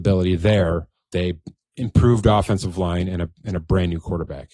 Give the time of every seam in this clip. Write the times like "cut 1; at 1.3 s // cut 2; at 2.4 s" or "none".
cut 1; at 1.1 s